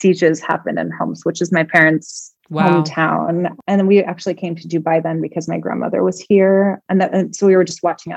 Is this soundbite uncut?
no; 1 cut; at 2.4 s

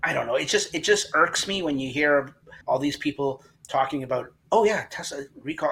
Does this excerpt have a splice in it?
yes; 1 cut; at 2.6 s

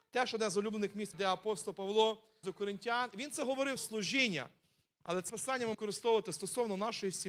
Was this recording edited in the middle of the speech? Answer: yes; 5 cuts; at 1.1 s, 2.4 s, 3.8 s, 5.3 s, 5.7 s

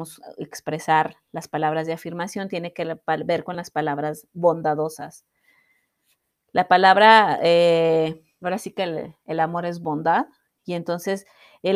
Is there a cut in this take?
no; 0 cuts

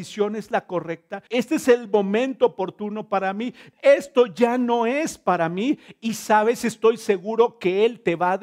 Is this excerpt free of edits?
no; 1 cut; at 1.3 s

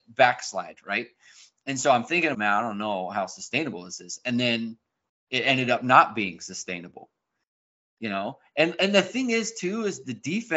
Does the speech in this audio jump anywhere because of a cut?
yes; 1 cut; at 2.3 s

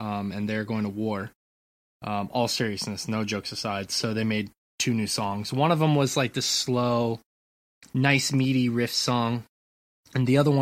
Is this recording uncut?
yes; 0 cuts

